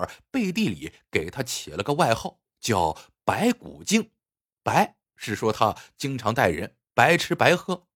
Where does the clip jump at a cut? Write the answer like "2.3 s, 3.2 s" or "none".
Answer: 4.2 s